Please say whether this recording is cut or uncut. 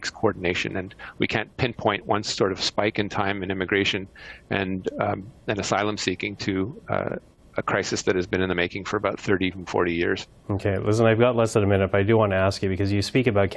cut